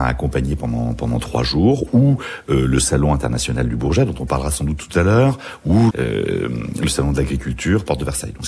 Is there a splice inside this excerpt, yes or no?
yes